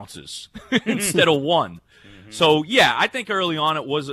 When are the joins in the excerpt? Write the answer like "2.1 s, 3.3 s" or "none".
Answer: none